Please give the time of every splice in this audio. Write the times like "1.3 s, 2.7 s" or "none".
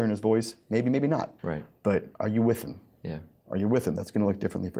1.4 s, 2.1 s